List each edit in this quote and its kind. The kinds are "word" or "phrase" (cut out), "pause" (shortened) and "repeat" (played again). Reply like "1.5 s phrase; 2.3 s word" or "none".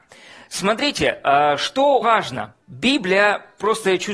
2.0 s word; 2.6 s pause